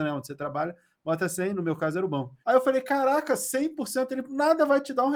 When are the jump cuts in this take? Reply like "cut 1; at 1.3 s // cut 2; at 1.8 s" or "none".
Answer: cut 1; at 2.4 s